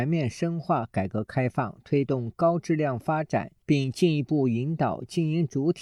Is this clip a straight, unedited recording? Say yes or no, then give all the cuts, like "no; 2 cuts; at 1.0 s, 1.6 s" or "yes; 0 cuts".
yes; 0 cuts